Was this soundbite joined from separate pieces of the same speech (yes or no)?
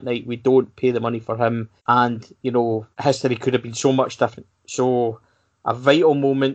yes